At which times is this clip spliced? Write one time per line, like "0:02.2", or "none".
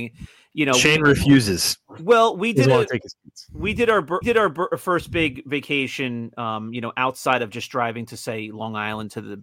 0:04.2

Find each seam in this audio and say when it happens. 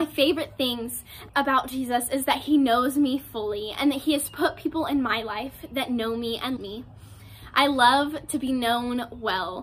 0:01.3
0:06.6

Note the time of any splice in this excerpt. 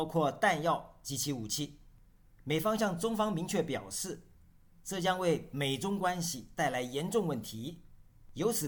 none

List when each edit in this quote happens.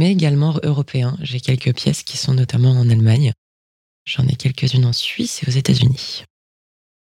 none

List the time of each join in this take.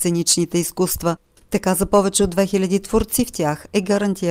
none

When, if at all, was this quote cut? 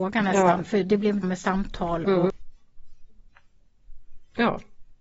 0:01.2

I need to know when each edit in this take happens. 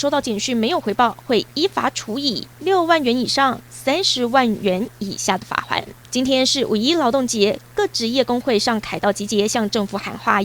0:06.0

